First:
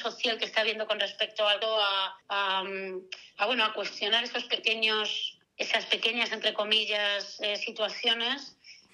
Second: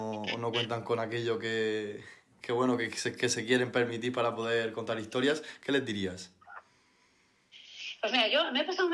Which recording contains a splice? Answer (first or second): first